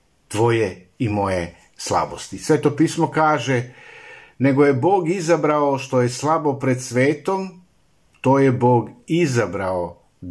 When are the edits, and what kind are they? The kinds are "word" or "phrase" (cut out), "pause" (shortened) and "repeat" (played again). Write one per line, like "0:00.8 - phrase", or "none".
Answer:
none